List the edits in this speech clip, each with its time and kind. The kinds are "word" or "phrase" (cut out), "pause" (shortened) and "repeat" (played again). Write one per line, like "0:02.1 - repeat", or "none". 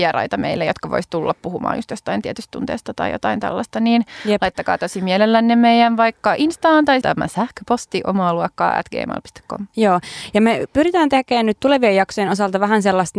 0:07.0 - phrase